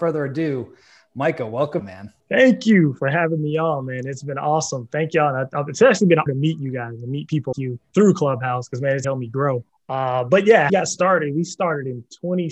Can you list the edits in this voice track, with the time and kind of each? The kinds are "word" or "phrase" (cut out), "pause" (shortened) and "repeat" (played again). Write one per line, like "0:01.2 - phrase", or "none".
0:01.8 - phrase
0:02.2 - pause
0:06.3 - word
0:07.5 - word
0:09.0 - word
0:09.7 - pause
0:10.7 - phrase

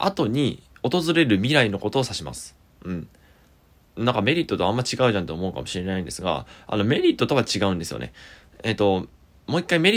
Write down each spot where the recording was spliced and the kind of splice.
none

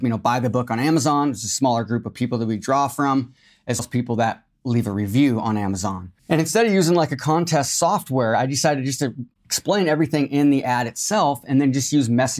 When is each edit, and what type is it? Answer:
0:03.8 - word
0:06.2 - pause

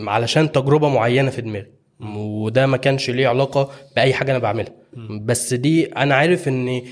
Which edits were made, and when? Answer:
none

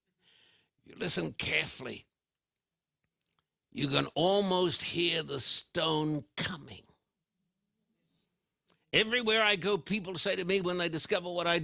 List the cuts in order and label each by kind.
none

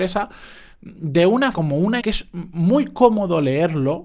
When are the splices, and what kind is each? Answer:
0:01.5 - word
0:02.0 - word

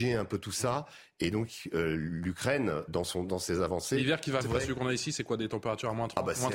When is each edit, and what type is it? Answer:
0:02.9 - word
0:04.4 - word

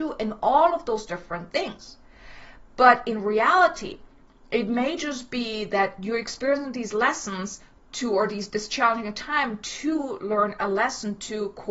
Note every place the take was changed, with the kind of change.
none

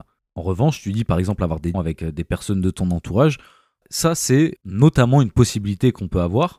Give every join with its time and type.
0:01.7 - word
0:03.8 - word
0:04.6 - word

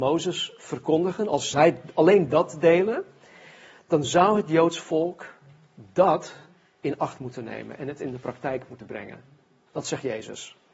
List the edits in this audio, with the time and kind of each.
none

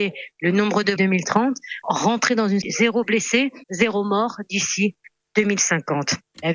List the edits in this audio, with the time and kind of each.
0:01.0 - phrase
0:01.8 - word
0:02.6 - word
0:03.6 - pause

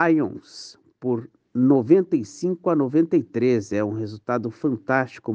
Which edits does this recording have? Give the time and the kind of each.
none

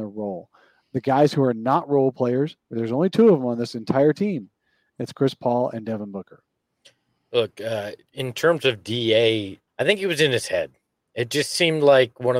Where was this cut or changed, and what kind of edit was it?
0:08.0 - pause
0:09.7 - phrase

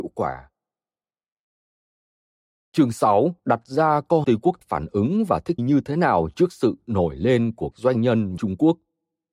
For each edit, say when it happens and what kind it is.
0:03.4 - pause
0:04.2 - phrase
0:04.6 - phrase
0:05.6 - word
0:07.7 - word
0:08.4 - phrase

